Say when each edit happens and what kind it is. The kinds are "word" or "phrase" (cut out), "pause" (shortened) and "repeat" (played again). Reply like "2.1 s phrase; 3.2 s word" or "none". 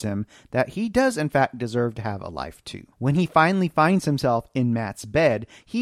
2.9 s pause

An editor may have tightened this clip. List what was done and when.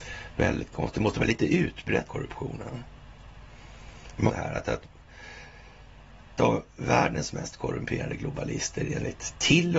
2.1 s phrase; 4.3 s phrase; 6.4 s word

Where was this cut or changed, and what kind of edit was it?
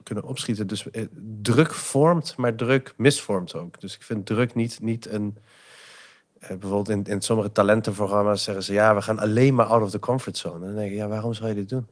none

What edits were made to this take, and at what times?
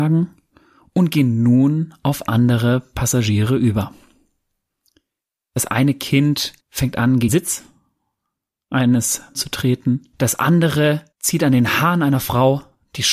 6.6 s pause; 7.3 s word; 9.3 s phrase; 10.1 s pause; 11.1 s pause

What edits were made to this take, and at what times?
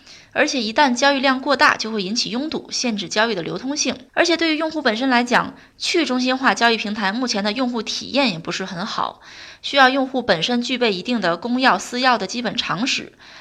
4.1 s pause

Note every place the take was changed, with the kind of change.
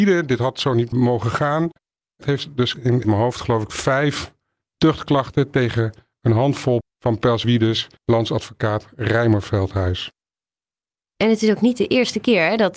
2.2 s word; 2.7 s word; 3.0 s phrase; 6.8 s word; 7.4 s phrase; 8.0 s pause

